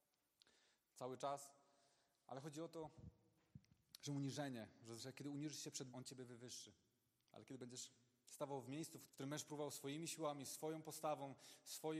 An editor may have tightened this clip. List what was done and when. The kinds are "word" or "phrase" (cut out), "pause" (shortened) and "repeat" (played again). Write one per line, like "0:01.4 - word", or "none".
0:05.0 - word
0:05.9 - word
0:09.1 - word